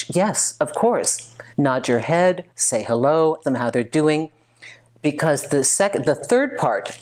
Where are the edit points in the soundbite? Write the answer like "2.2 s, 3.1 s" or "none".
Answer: 1.5 s, 2.5 s, 3.4 s